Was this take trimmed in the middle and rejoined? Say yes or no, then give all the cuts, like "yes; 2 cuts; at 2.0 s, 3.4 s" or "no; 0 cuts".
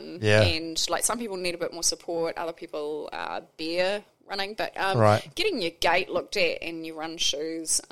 no; 0 cuts